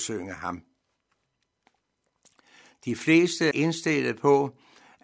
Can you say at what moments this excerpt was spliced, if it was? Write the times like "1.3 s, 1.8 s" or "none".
3.5 s